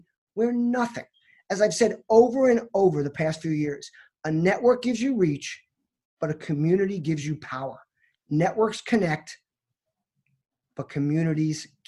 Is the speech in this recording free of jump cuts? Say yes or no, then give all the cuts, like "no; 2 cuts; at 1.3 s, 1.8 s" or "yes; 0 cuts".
yes; 0 cuts